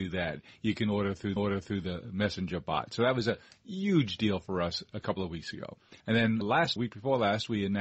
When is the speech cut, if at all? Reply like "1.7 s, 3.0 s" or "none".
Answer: 1.4 s, 6.0 s, 6.4 s, 6.8 s